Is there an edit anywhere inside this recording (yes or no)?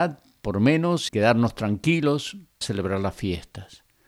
yes